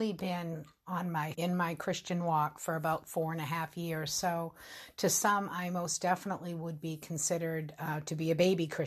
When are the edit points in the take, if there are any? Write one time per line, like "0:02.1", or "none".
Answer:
0:01.3